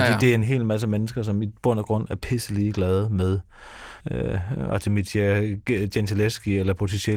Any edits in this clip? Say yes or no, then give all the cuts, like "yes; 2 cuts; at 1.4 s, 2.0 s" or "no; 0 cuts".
yes; 1 cut; at 4.0 s